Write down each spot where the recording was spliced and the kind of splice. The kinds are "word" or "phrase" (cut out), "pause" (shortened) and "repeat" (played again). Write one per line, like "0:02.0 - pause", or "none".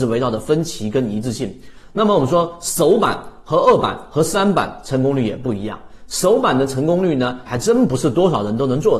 0:07.4 - phrase